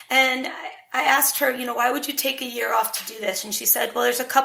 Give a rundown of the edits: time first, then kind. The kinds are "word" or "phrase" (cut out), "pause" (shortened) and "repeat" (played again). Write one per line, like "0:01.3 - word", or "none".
none